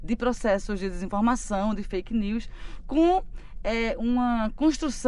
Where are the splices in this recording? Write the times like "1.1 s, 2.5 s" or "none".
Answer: none

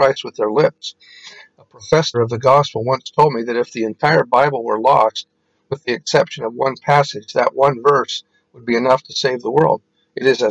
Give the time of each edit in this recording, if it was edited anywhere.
2.1 s

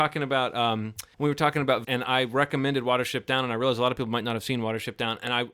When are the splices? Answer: 1.1 s, 1.8 s

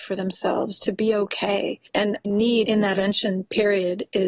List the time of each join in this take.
2.2 s, 2.9 s

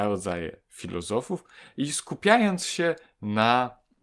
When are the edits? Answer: none

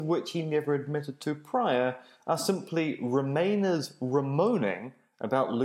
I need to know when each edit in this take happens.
none

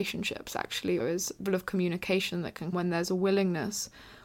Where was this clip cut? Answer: 1.0 s, 1.5 s, 2.7 s

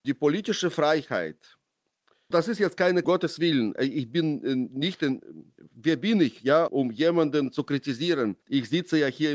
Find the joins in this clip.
2.3 s, 3.0 s, 4.7 s, 5.6 s, 6.7 s, 8.4 s

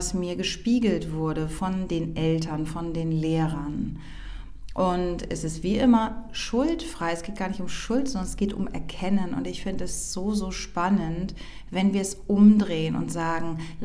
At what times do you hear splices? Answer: none

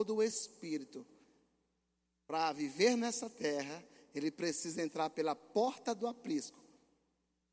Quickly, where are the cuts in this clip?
none

